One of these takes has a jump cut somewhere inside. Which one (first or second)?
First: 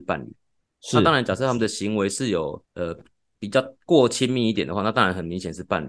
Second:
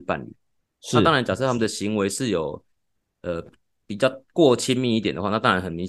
first